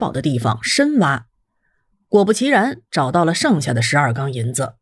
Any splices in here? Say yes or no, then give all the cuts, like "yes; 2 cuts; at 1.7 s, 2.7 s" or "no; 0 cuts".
no; 0 cuts